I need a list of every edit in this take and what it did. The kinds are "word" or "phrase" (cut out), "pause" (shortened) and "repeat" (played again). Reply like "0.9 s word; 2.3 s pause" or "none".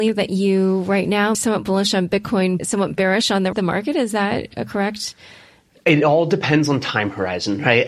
1.3 s phrase; 2.6 s word; 3.5 s word

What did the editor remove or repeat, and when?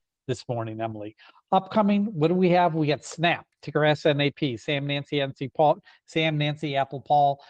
none

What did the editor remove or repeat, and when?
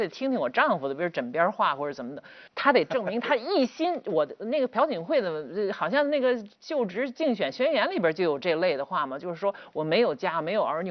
2.5 s pause

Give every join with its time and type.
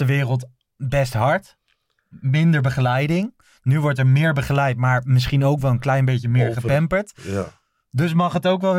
none

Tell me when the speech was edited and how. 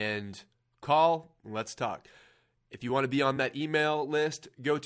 none

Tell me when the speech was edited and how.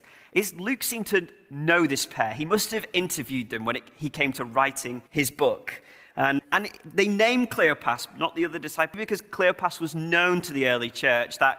5.1 s pause; 6.4 s word; 8.9 s word

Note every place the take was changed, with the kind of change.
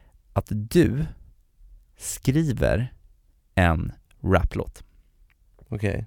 none

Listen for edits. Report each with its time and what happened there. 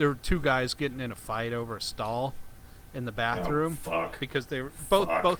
none

